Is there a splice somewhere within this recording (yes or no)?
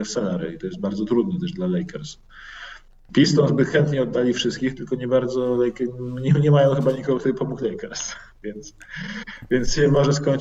no